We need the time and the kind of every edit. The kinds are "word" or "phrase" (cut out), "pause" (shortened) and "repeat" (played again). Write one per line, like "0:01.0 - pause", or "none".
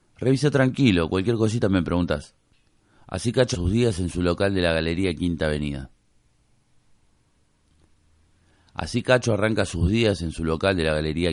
0:03.5 - word